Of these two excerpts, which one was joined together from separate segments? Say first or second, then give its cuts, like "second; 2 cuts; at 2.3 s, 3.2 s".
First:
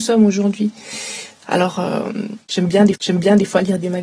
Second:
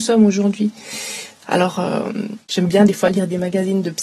first; 1 cut; at 3.0 s